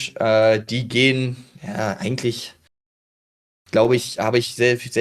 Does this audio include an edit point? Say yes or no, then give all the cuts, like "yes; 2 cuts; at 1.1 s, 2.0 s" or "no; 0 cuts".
no; 0 cuts